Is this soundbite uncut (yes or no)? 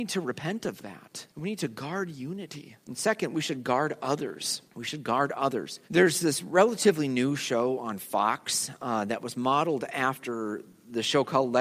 no